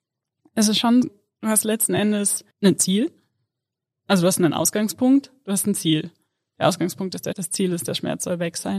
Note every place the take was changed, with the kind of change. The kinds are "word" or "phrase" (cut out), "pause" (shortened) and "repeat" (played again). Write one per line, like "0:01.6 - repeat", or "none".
0:01.0 - word
0:02.5 - pause
0:07.3 - word